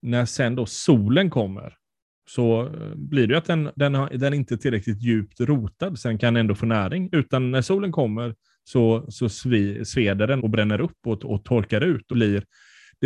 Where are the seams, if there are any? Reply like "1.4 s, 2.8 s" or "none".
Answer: 10.4 s, 12.1 s

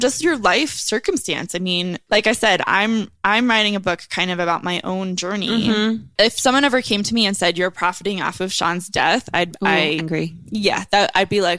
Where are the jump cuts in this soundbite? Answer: 6.1 s, 10.0 s

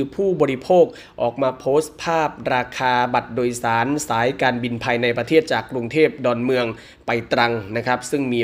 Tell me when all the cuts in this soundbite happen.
none

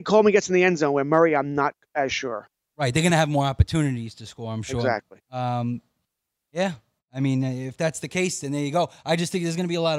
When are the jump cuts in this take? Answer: none

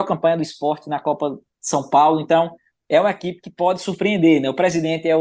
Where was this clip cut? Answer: none

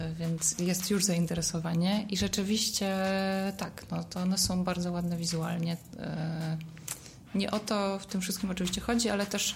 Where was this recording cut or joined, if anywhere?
none

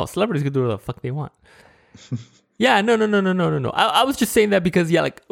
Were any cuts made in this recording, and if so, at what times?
none

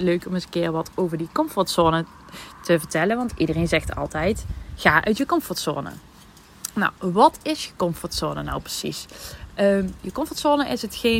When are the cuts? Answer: 7.0 s

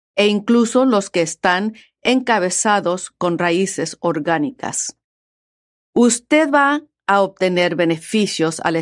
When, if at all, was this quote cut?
none

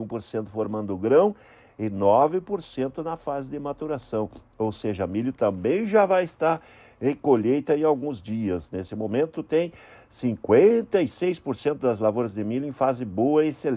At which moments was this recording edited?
none

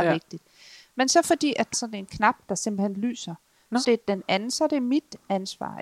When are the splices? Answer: 1.7 s, 3.8 s

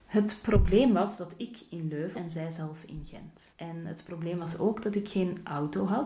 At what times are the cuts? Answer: 2.1 s, 3.5 s

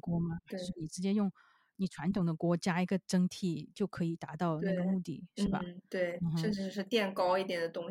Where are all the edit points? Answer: none

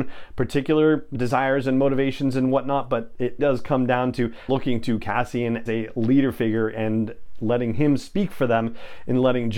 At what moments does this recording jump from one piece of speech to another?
1.1 s, 3.4 s, 4.5 s, 5.7 s

